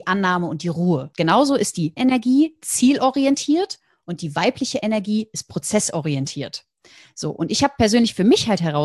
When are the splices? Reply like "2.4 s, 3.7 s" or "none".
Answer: 2.0 s